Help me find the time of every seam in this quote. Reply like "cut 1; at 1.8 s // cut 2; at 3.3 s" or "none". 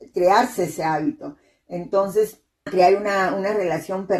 cut 1; at 2.7 s